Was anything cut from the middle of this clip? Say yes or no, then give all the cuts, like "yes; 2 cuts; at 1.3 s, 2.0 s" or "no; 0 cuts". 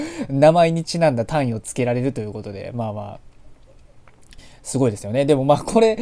no; 0 cuts